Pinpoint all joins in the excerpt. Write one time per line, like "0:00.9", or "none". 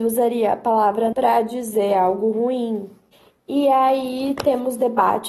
0:01.1
0:03.1